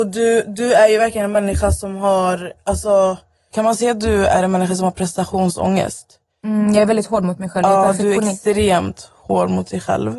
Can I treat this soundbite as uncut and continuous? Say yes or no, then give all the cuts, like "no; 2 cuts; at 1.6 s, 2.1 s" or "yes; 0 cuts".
yes; 0 cuts